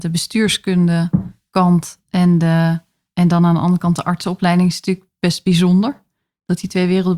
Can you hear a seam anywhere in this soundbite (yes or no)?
no